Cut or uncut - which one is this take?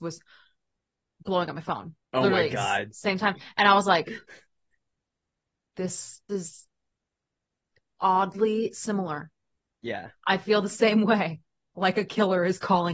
cut